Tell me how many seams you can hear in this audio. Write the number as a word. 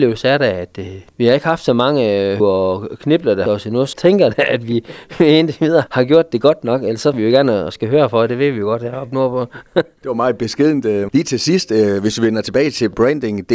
six